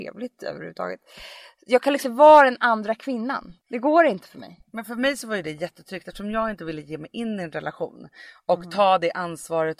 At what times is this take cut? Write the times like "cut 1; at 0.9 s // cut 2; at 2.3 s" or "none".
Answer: cut 1; at 2.0 s // cut 2; at 3.6 s